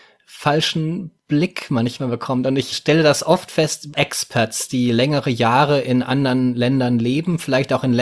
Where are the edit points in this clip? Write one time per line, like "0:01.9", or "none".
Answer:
0:01.2
0:02.7
0:03.9